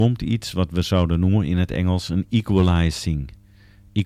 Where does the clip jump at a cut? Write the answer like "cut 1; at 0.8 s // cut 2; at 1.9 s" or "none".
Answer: none